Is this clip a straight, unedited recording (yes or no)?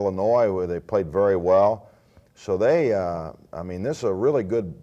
yes